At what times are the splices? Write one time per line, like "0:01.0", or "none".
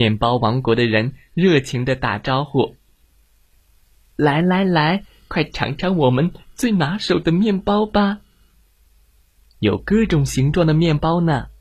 none

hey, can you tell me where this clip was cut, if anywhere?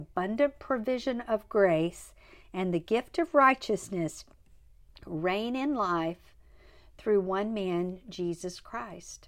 none

